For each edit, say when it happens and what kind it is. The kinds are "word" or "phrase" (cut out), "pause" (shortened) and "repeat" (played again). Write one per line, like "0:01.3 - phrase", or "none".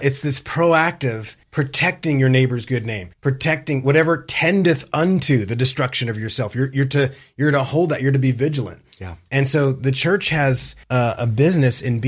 0:01.4 - pause
0:03.1 - pause
0:10.8 - pause